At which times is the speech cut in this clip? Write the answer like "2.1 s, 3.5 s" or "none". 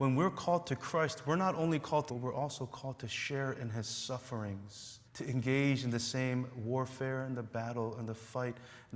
2.1 s, 5.1 s